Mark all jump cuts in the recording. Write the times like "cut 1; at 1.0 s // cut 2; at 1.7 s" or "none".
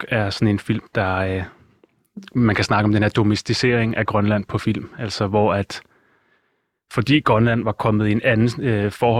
none